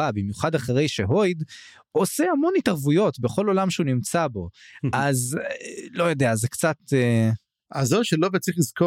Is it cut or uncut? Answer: uncut